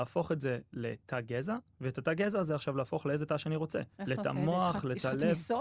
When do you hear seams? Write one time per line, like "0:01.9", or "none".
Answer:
0:03.9